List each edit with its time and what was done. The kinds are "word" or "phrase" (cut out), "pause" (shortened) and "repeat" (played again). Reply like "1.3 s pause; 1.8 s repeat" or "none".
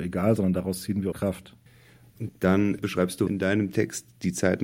1.1 s word; 3.3 s word